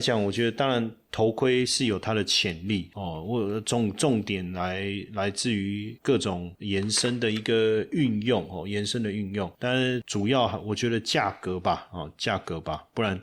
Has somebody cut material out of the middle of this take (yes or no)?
no